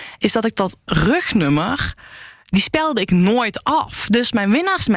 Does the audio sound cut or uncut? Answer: uncut